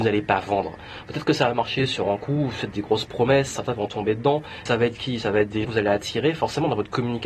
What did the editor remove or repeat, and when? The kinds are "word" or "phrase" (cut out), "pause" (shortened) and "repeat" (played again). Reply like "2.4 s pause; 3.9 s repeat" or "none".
4.7 s word; 5.6 s word